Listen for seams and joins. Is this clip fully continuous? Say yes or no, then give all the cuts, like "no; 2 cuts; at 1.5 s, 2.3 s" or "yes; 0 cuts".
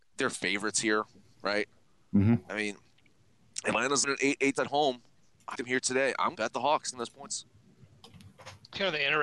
no; 6 cuts; at 2.5 s, 4.0 s, 4.6 s, 5.5 s, 6.3 s, 6.9 s